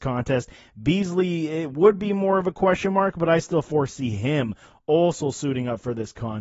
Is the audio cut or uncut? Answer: uncut